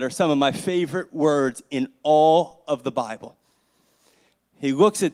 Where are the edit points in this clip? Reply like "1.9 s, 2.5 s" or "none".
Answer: none